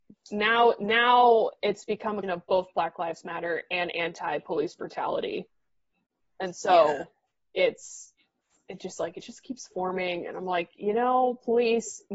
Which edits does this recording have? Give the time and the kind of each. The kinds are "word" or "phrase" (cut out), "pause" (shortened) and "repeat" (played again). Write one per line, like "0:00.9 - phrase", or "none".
0:02.2 - word

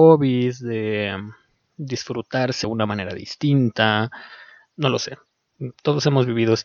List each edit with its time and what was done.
0:02.6 - word

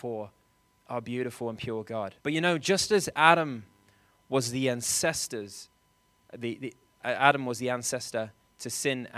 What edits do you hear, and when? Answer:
0:02.2 - pause

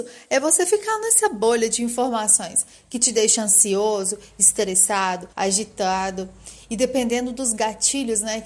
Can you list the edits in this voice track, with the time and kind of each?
0:05.3 - pause

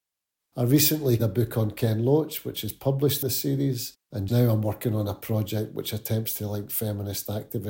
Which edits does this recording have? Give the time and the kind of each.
0:01.2 - word
0:03.2 - word
0:04.3 - word

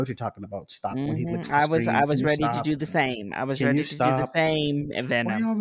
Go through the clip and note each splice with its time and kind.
none

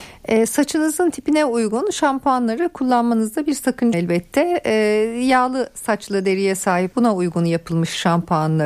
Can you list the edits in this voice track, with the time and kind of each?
0:03.9 - phrase
0:06.9 - word

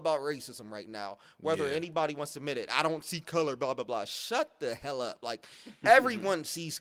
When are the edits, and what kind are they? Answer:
none

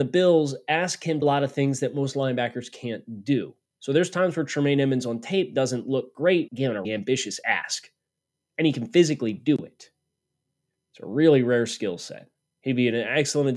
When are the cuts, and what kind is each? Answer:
0:01.2 - phrase
0:06.5 - phrase
0:06.8 - word
0:08.2 - pause

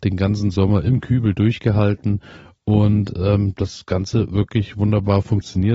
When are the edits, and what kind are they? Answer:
none

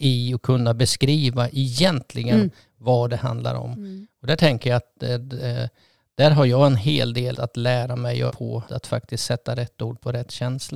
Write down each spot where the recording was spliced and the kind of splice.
0:07.3 - word
0:08.3 - word
0:08.6 - word

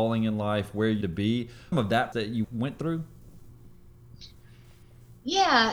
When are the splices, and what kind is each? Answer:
0:01.0 - word
0:01.7 - word
0:02.1 - word
0:02.4 - word

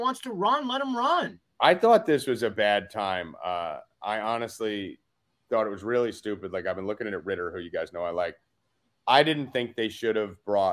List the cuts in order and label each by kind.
none

